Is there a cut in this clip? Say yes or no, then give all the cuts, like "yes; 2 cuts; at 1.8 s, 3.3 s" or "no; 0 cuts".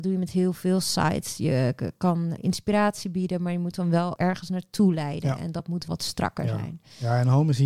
yes; 3 cuts; at 2.4 s, 4.2 s, 5.9 s